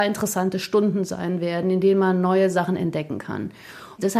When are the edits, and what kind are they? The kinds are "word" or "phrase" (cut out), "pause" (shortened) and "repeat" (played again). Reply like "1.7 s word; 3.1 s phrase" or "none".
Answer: none